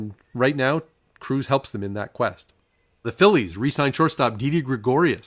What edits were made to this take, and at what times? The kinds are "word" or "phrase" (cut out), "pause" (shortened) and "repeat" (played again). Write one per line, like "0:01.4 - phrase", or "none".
0:03.0 - word